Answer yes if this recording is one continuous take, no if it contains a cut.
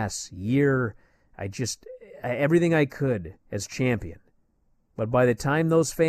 no